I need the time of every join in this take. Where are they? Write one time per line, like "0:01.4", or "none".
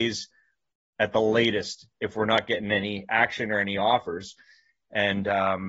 none